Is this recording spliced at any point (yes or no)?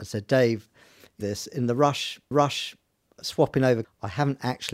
yes